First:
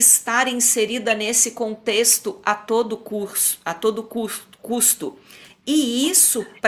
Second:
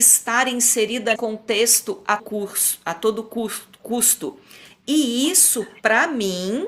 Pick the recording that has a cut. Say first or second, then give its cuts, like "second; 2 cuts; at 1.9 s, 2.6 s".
second; 2 cuts; at 1.2 s, 2.2 s